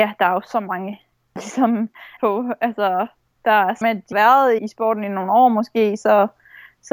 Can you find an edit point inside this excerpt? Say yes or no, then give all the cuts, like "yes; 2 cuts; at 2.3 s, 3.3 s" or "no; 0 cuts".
yes; 5 cuts; at 1.4 s, 2.2 s, 3.8 s, 4.1 s, 4.6 s